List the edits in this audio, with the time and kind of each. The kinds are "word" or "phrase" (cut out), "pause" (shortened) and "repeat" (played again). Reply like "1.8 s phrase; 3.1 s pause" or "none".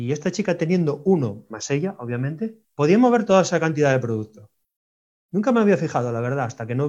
2.6 s pause; 4.9 s pause